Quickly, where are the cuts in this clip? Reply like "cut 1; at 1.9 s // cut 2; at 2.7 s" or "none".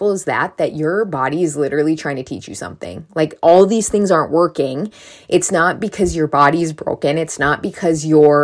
none